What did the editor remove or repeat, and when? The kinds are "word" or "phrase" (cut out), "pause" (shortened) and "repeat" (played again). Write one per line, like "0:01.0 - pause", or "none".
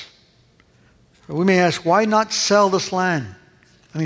none